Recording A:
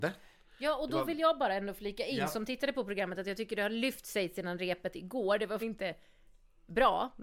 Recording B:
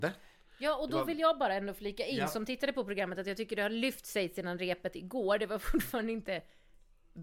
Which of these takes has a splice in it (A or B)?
A